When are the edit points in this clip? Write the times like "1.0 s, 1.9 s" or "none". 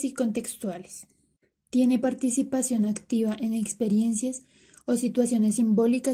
none

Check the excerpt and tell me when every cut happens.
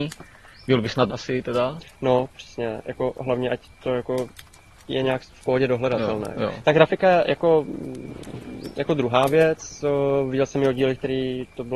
1.1 s

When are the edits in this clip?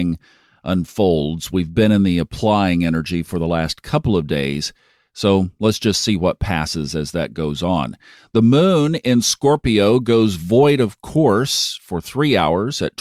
none

